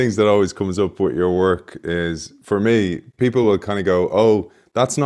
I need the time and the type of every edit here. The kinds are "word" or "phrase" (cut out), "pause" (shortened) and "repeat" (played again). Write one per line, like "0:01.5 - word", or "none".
none